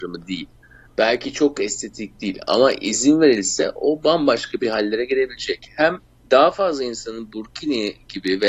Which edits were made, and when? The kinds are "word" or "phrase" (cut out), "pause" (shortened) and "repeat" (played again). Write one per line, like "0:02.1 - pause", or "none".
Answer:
none